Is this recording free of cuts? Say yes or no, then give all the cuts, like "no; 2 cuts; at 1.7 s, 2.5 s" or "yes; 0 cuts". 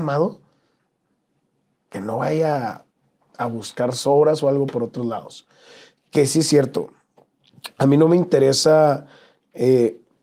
yes; 0 cuts